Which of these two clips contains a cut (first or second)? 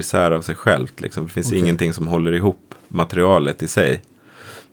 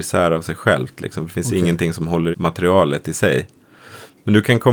second